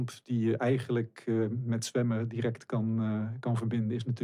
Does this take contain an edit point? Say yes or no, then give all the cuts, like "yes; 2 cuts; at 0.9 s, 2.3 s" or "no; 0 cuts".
no; 0 cuts